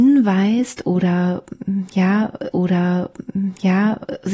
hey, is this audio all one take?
no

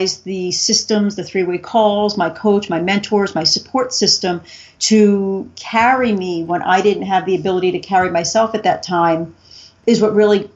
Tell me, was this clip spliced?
no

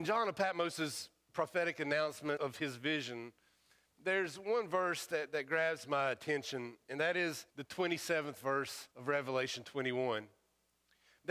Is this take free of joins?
no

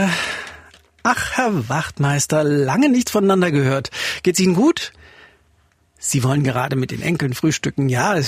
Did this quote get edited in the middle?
no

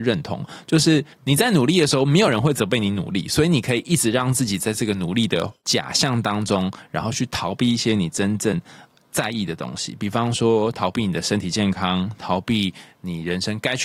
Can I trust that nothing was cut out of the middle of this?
no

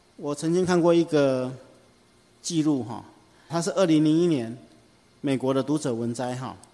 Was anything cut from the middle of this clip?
yes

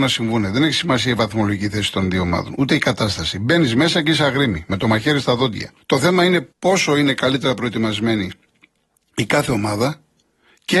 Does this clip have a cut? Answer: yes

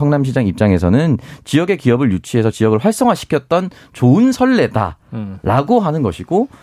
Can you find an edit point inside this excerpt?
no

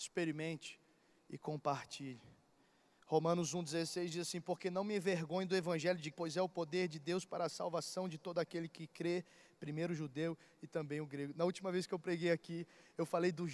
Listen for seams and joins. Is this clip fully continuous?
no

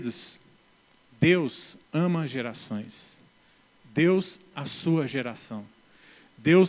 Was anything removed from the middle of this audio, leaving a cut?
yes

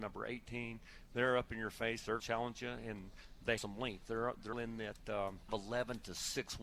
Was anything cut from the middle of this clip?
yes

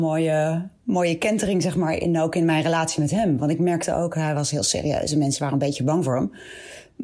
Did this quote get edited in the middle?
no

